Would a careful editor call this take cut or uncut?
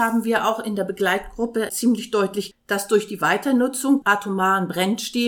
cut